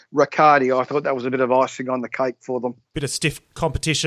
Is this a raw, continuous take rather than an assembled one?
yes; 0 cuts

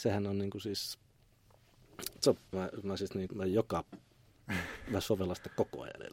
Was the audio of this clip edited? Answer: yes; 3 cuts; at 2.2 s, 2.5 s, 3.3 s

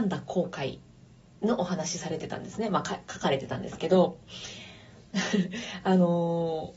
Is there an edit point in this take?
no; 0 cuts

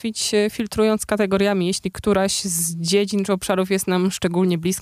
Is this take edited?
no; 0 cuts

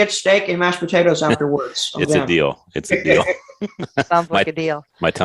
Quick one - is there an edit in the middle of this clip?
no; 0 cuts

